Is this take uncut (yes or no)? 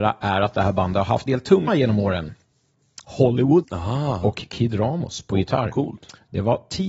no